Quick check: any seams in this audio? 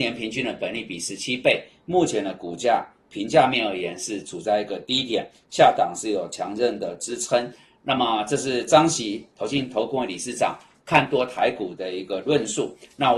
no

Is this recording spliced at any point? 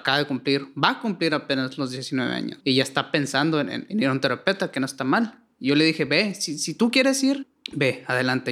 no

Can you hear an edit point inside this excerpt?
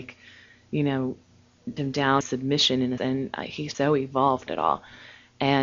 yes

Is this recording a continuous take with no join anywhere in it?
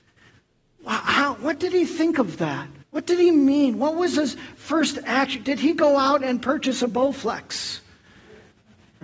no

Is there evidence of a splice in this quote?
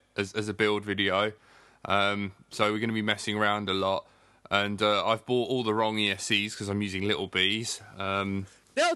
no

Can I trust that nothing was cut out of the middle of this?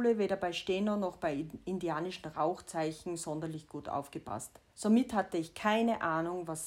no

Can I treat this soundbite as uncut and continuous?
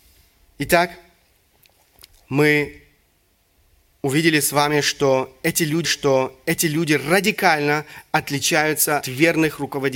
no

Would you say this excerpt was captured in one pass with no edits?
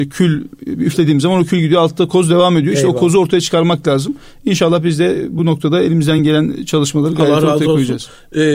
yes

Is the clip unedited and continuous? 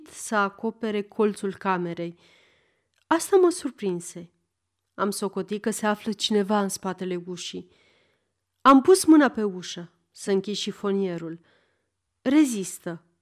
yes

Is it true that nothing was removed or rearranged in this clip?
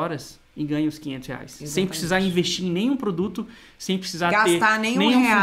yes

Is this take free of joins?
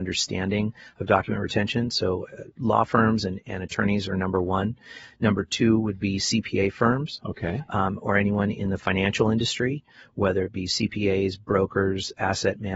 yes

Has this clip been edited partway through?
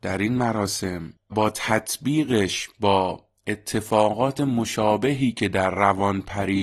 yes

